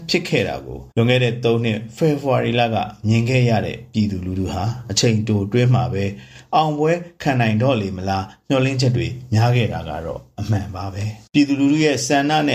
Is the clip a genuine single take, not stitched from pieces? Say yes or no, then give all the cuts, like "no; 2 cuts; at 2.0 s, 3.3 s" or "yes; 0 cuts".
no; 2 cuts; at 0.9 s, 11.3 s